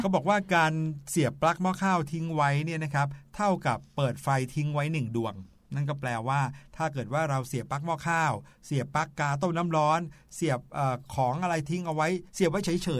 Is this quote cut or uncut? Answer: uncut